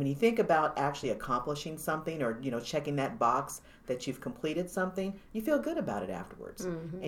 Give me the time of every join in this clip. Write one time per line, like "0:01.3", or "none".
none